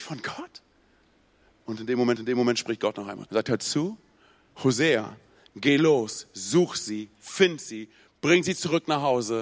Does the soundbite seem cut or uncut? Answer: cut